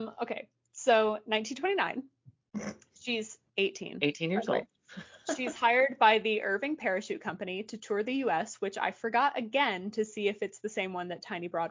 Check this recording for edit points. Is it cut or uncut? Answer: uncut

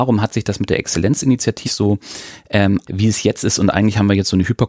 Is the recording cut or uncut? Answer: cut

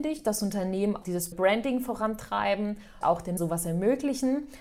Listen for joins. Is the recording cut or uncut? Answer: cut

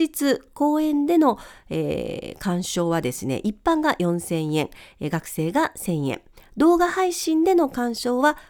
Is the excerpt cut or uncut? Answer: uncut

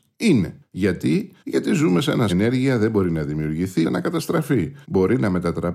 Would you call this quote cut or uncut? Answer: cut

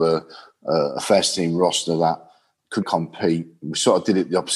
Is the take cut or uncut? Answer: cut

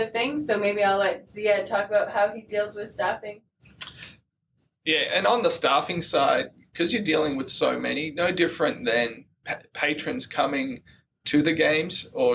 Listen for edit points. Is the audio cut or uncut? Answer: uncut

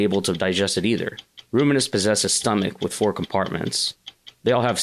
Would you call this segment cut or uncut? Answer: uncut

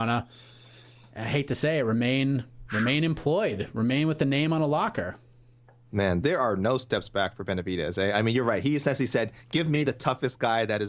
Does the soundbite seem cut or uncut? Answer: cut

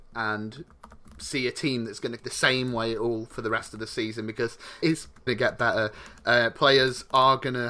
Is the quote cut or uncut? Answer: cut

